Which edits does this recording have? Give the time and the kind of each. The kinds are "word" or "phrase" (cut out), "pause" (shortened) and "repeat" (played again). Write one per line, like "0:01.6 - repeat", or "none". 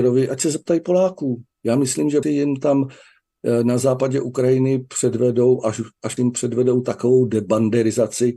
0:01.5 - pause
0:02.2 - word
0:06.2 - phrase